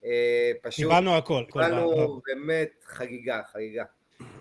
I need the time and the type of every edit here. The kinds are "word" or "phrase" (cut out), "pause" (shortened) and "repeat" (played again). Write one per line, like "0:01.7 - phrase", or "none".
0:01.5 - word